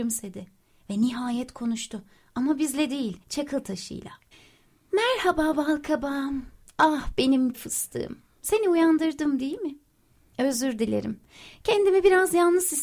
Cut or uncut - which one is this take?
cut